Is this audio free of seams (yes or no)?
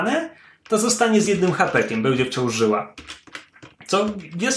yes